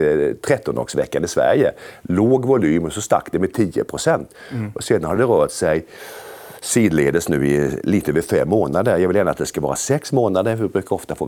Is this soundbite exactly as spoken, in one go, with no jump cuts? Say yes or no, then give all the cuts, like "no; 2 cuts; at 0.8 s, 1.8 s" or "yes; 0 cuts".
yes; 0 cuts